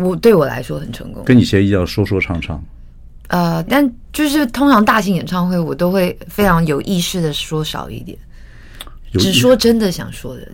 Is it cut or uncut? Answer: cut